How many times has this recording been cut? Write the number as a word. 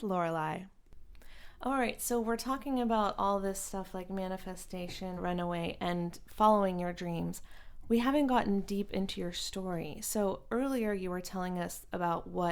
one